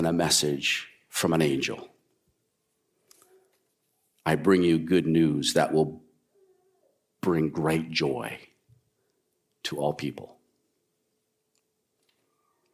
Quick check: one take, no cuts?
yes; 0 cuts

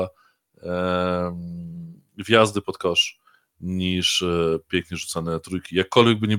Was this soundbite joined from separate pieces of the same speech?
no; 0 cuts

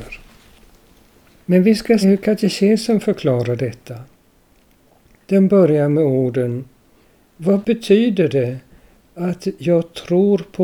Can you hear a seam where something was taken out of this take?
yes; 1 cut; at 2.0 s

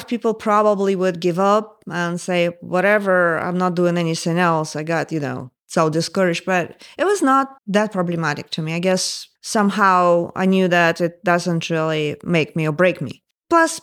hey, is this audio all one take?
no; 3 cuts; at 5.6 s, 7.6 s, 9.4 s

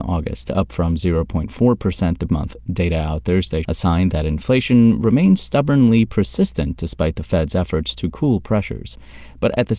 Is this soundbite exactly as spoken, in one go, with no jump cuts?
no; 2 cuts; at 2.3 s, 3.6 s

